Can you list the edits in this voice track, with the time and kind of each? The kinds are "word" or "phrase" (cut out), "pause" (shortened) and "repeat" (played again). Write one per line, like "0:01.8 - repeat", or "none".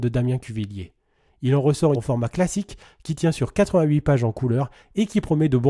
0:02.0 - phrase